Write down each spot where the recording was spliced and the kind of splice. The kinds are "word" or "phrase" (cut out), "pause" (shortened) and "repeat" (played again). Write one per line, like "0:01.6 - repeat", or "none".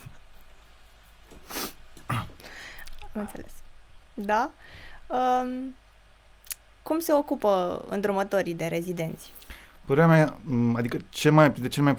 none